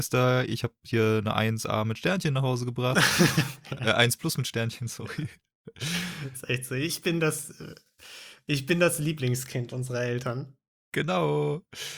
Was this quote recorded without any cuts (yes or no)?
yes